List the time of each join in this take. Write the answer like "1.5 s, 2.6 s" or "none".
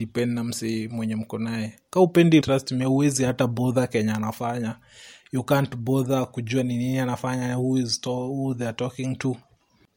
2.4 s